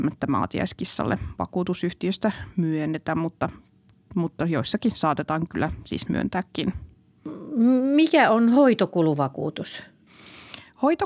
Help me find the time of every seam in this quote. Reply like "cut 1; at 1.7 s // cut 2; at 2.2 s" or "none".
none

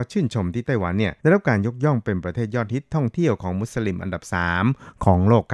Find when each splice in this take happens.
cut 1; at 1.2 s

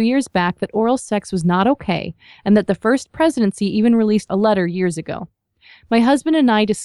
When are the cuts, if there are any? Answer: none

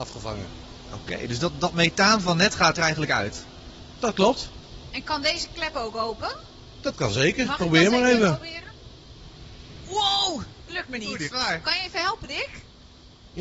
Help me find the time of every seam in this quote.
cut 1; at 2.8 s // cut 2; at 10.7 s // cut 3; at 11.3 s

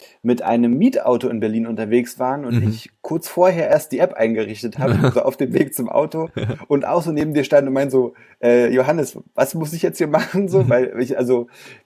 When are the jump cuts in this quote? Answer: cut 1; at 5.1 s

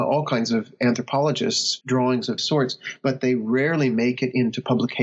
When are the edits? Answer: cut 1; at 1.8 s // cut 2; at 2.4 s

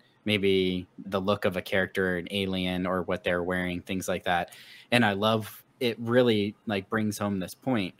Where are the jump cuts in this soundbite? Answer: cut 1; at 1.0 s // cut 2; at 5.7 s

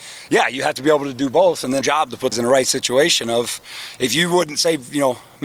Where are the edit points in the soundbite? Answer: cut 1; at 1.8 s // cut 2; at 2.3 s

